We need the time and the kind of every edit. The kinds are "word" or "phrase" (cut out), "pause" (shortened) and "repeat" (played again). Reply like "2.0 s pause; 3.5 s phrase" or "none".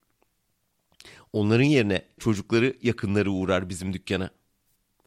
2.2 s word